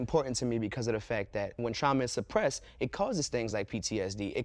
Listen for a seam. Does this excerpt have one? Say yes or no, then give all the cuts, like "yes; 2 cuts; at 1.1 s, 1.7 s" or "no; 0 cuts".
no; 0 cuts